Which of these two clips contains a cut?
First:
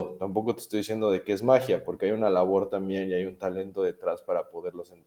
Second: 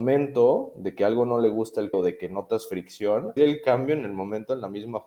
second; 2 cuts; at 1.9 s, 3.4 s

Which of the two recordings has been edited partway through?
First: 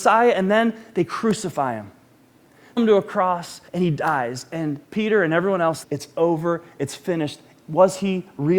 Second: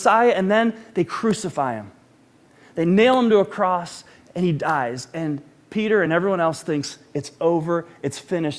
first; 4 cuts; at 2.8 s, 3.7 s, 4.8 s, 5.8 s

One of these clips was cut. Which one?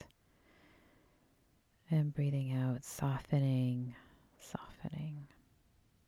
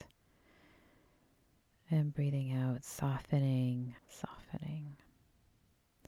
second; 1 cut; at 4.0 s

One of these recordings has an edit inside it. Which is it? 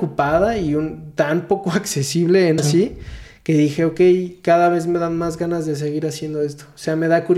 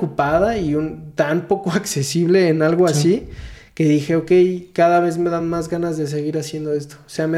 first; 1 cut; at 2.6 s

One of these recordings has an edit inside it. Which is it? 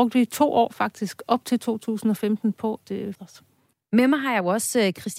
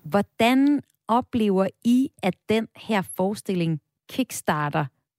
first; 2 cuts; at 2.8 s, 3.1 s

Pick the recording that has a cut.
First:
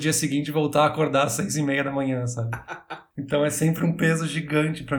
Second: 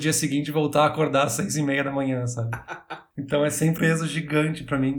second; 1 cut; at 3.8 s

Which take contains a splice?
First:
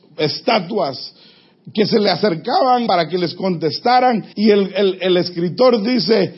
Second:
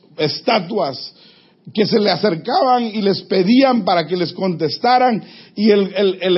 first; 2 cuts; at 2.9 s, 4.3 s

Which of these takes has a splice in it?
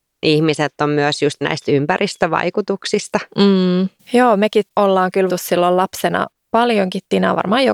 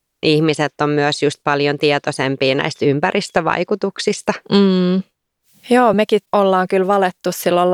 first; 3 cuts; at 1.4 s, 4.0 s, 5.3 s

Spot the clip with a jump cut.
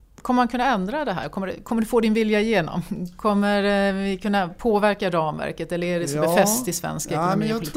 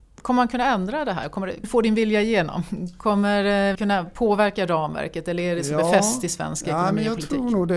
second; 2 cuts; at 1.6 s, 3.7 s

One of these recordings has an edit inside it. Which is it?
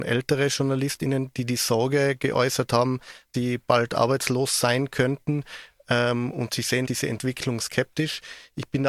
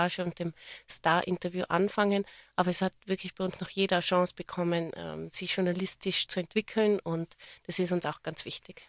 first; 3 cuts; at 3.3 s, 6.8 s, 7.6 s

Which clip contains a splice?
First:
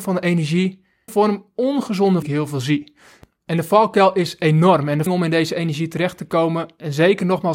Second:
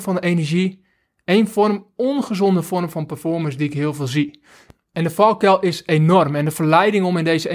first; 3 cuts; at 1.1 s, 2.2 s, 5.1 s

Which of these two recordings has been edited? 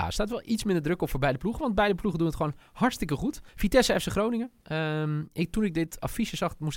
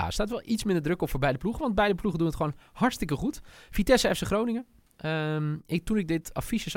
first; 2 cuts; at 3.5 s, 4.6 s

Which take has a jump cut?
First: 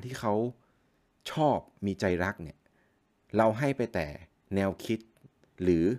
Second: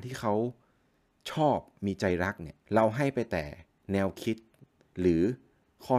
second; 1 cut; at 2.6 s

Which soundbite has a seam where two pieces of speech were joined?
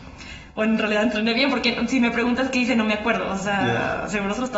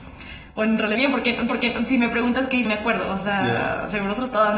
second; 3 cuts; at 0.9 s, 1.5 s, 2.6 s

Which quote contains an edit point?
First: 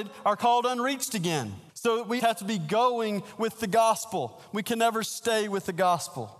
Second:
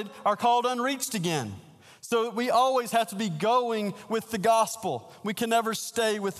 first; 2 cuts; at 1.7 s, 2.2 s

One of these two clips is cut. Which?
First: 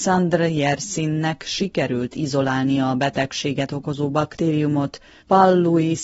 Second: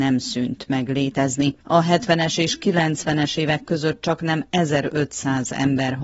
second; 1 cut; at 1.6 s

